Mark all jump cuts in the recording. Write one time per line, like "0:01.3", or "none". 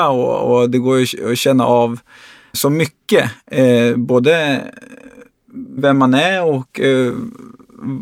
0:02.5
0:05.8